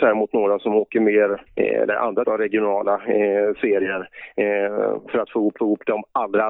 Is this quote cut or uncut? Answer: cut